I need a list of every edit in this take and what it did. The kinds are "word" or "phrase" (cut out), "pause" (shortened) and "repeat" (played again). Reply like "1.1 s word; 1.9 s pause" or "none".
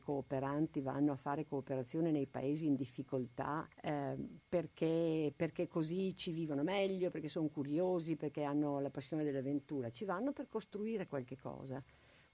3.7 s pause